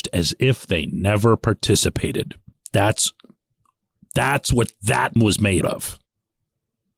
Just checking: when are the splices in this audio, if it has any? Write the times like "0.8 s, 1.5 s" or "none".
2.5 s, 5.2 s, 5.6 s